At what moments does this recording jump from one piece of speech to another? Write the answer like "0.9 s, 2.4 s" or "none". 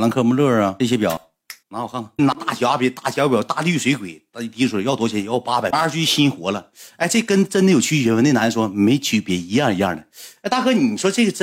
1.6 s